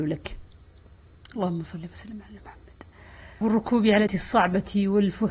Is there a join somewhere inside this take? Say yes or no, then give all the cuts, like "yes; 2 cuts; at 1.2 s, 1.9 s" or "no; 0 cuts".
yes; 2 cuts; at 3.4 s, 4.1 s